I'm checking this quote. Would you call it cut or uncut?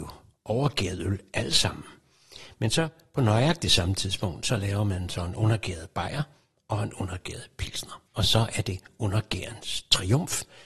cut